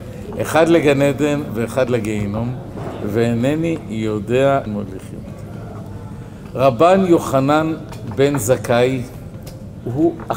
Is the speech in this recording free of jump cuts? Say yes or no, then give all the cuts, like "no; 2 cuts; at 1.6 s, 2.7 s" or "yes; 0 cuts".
no; 1 cut; at 4.7 s